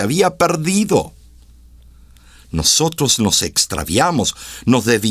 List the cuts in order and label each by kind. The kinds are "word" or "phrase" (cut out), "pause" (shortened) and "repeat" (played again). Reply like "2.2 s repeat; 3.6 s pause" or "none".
none